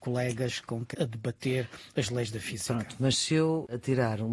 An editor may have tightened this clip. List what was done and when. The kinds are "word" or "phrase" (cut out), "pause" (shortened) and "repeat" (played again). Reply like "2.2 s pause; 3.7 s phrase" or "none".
0.9 s word